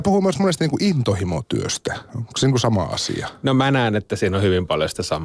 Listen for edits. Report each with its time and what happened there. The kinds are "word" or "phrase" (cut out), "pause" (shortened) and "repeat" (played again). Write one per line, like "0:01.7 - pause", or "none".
none